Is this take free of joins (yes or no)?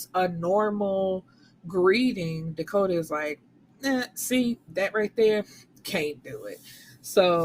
yes